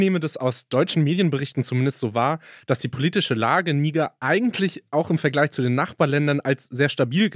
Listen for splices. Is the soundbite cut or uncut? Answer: uncut